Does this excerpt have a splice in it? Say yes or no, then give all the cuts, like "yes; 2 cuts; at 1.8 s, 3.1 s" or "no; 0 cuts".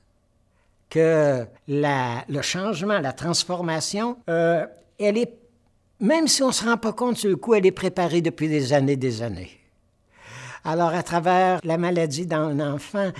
yes; 3 cuts; at 1.6 s, 4.2 s, 11.6 s